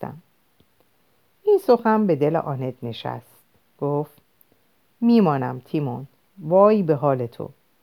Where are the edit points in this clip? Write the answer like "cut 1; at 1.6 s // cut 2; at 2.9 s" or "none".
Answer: none